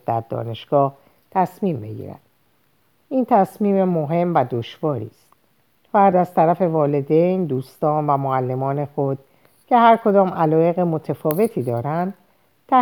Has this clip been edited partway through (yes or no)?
no